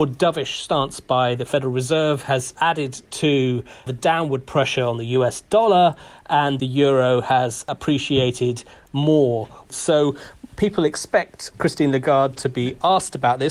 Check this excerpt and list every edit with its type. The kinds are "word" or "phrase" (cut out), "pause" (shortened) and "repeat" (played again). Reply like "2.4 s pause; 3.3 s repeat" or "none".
none